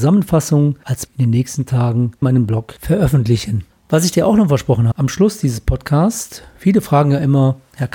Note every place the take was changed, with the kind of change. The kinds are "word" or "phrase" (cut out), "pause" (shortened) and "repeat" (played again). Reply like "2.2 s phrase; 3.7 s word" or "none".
1.1 s word; 2.2 s word; 3.7 s pause; 4.9 s word